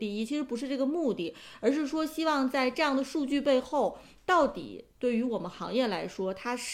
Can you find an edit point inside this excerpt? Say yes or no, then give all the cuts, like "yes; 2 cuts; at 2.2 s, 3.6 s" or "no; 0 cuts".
no; 0 cuts